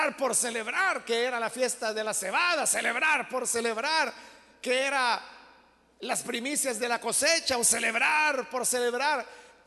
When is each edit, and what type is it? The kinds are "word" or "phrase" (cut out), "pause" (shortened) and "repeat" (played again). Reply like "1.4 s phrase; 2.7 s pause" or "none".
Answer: none